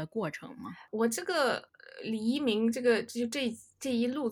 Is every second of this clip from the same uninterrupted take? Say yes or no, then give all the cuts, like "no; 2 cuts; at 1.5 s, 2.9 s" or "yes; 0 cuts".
yes; 0 cuts